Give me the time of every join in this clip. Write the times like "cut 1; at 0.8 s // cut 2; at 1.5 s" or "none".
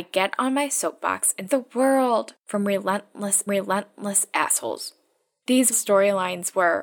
cut 1; at 1.5 s // cut 2; at 2.4 s // cut 3; at 3.5 s // cut 4; at 5.7 s